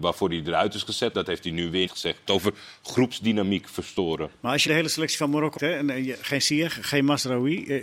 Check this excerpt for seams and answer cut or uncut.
cut